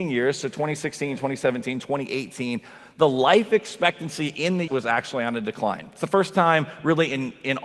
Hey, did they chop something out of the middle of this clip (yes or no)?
yes